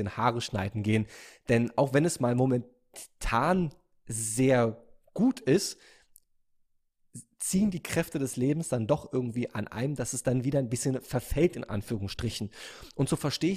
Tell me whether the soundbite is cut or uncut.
uncut